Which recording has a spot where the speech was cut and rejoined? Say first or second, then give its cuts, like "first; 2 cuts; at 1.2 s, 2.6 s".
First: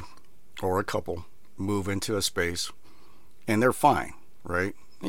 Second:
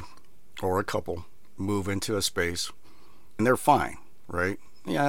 second; 1 cut; at 3.4 s